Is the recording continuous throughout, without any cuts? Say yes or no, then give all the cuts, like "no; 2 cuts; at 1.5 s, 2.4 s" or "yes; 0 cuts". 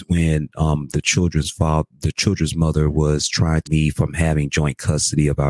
no; 1 cut; at 3.7 s